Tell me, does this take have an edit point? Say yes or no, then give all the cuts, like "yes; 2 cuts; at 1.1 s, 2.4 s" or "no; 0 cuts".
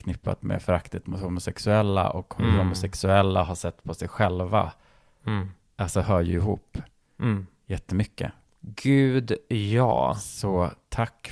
no; 0 cuts